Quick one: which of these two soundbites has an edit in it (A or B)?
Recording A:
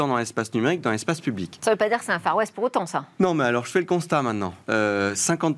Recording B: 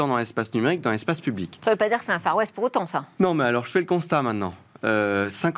A